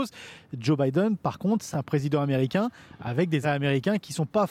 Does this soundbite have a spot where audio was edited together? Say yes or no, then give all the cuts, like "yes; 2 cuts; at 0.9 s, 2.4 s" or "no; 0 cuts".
yes; 2 cuts; at 1.7 s, 3.4 s